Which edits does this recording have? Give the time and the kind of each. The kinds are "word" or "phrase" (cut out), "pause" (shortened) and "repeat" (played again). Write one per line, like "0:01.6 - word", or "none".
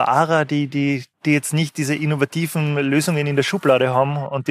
0:01.1 - pause